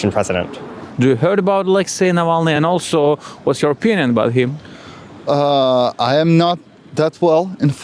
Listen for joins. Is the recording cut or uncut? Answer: uncut